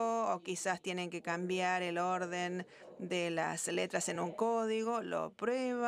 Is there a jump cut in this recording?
no; 0 cuts

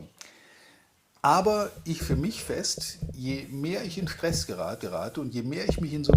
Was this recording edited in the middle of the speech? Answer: yes; 2 cuts; at 2.0 s, 4.8 s

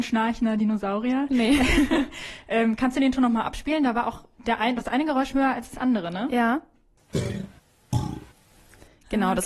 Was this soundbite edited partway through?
yes; 1 cut; at 5.3 s

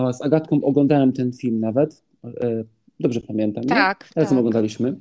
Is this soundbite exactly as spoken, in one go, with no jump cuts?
yes; 0 cuts

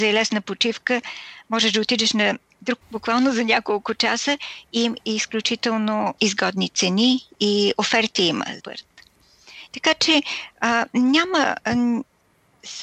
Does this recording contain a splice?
yes; 3 cuts; at 2.8 s, 6.2 s, 8.6 s

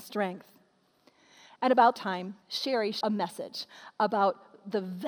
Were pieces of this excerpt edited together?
yes; 3 cuts; at 2.0 s, 2.4 s, 3.0 s

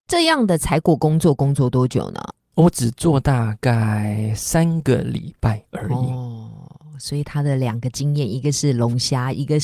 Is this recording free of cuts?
yes; 0 cuts

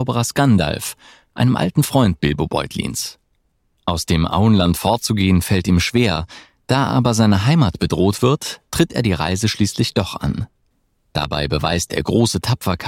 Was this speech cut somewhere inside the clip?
no; 0 cuts

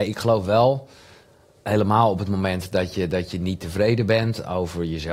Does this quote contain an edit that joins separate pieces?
no; 0 cuts

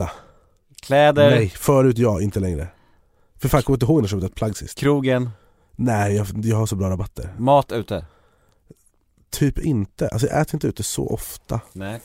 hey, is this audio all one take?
yes; 0 cuts

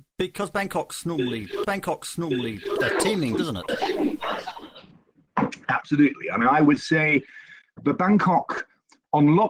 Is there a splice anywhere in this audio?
yes; 3 cuts; at 1.6 s, 3.4 s, 7.8 s

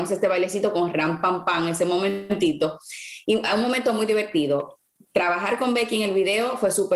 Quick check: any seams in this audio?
no; 0 cuts

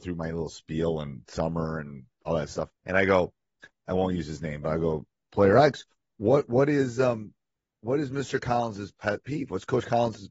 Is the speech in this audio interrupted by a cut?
yes; 1 cut; at 2.7 s

